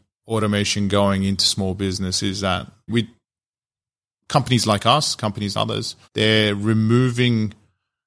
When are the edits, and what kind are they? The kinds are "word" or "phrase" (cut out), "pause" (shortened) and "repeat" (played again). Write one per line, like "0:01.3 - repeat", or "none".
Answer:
0:02.9 - word
0:05.5 - word
0:06.0 - pause